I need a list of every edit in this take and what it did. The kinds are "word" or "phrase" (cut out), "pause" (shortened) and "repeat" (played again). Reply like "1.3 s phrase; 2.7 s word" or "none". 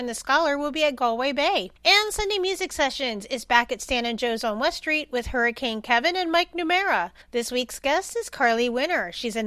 1.8 s pause; 7.2 s pause